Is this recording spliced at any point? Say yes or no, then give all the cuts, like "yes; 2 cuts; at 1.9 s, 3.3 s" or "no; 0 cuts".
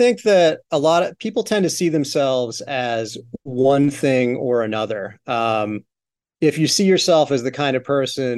no; 0 cuts